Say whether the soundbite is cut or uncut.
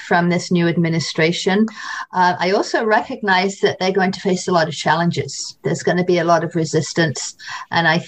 uncut